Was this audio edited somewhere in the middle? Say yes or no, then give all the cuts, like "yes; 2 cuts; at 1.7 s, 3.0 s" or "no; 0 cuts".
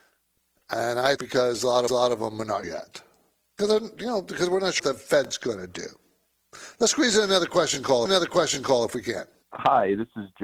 yes; 6 cuts; at 1.2 s, 1.9 s, 2.6 s, 4.8 s, 8.1 s, 9.4 s